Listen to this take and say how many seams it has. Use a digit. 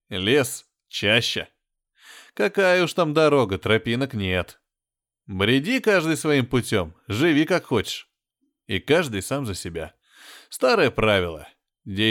0